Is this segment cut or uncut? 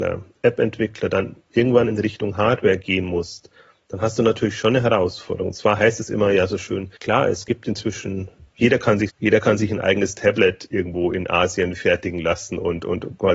cut